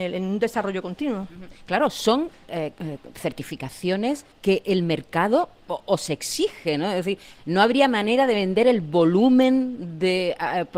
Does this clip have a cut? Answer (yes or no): yes